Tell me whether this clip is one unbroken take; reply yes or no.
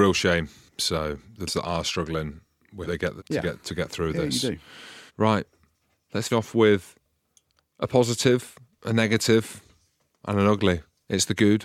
no